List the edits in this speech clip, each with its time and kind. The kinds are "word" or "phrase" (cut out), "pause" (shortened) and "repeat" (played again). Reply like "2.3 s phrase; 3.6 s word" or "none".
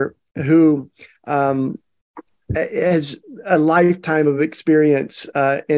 none